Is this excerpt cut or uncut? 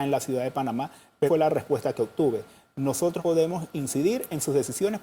cut